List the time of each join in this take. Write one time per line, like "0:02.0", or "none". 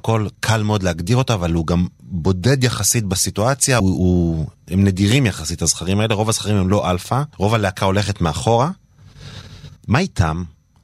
0:03.8
0:07.3
0:09.8